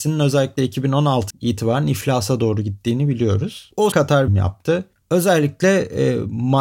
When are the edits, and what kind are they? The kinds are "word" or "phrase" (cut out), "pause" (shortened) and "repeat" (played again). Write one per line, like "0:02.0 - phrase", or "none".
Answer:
0:01.3 - word
0:03.9 - word
0:04.3 - phrase